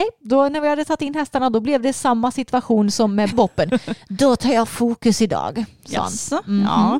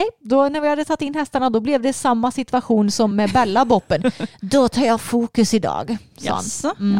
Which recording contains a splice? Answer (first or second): first